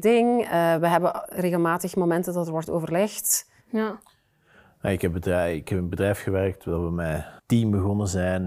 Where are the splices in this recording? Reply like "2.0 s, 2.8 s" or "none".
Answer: 3.6 s, 7.4 s